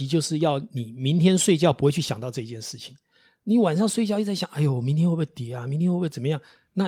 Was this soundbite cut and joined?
no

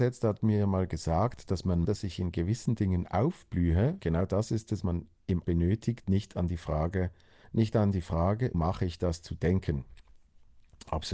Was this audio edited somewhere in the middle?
yes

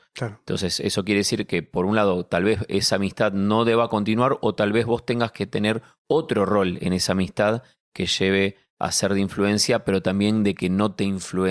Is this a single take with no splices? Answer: yes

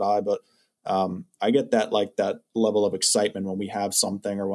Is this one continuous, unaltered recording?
yes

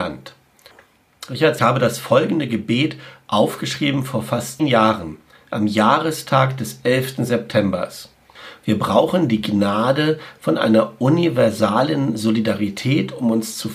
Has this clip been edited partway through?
yes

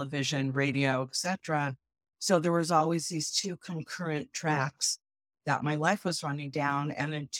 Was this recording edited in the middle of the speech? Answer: no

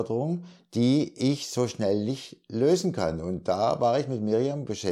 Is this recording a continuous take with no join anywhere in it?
yes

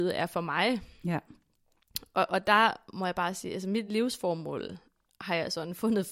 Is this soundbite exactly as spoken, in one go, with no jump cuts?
yes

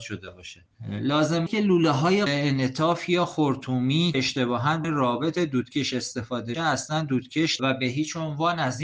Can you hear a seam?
yes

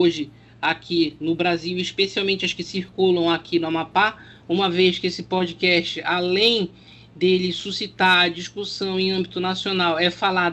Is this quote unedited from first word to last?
yes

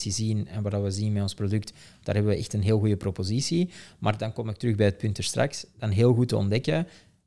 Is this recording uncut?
yes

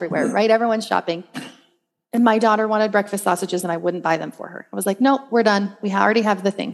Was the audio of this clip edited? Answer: no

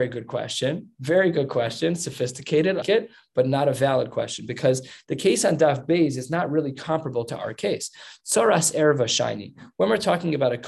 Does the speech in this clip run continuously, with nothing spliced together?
no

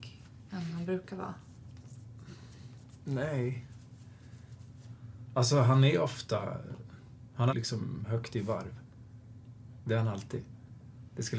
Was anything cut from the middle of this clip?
yes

